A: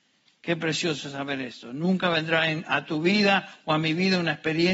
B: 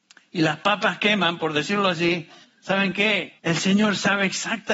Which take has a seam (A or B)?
B